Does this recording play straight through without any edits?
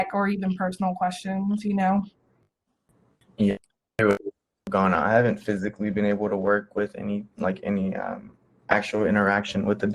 yes; 0 cuts

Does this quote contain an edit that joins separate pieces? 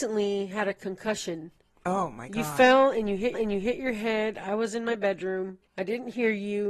yes; 2 cuts; at 3.3 s, 5.7 s

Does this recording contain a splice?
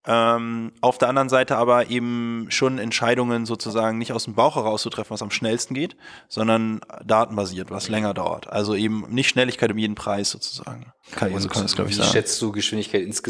yes; 1 cut; at 11.0 s

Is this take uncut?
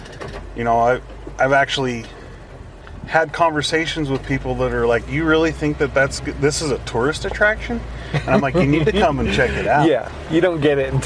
yes; 0 cuts

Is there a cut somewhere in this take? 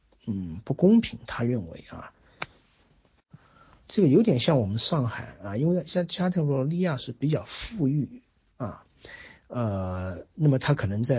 no; 0 cuts

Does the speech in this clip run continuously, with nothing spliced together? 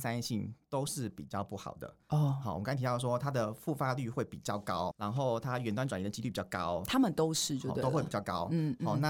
no; 2 cuts; at 2.0 s, 4.9 s

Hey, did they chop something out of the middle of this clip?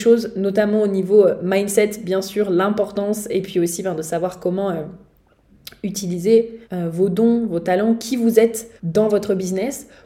yes; 2 cuts; at 6.6 s, 8.8 s

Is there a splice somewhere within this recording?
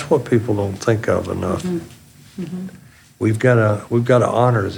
no; 0 cuts

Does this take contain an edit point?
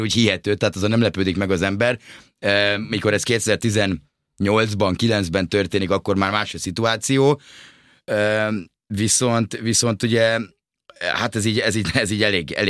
no; 0 cuts

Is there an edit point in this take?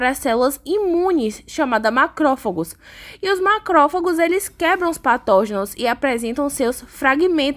no; 0 cuts

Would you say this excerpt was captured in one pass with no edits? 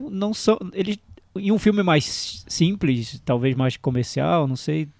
yes; 0 cuts

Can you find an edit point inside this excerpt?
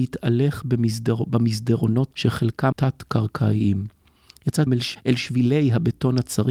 yes; 3 cuts; at 2.1 s, 2.7 s, 4.7 s

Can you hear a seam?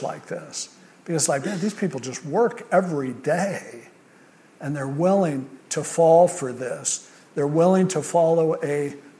no; 0 cuts

